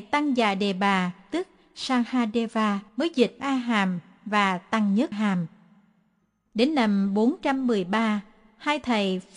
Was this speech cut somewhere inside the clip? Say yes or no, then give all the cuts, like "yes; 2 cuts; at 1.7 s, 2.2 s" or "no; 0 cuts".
yes; 3 cuts; at 2.9 s, 3.4 s, 5.1 s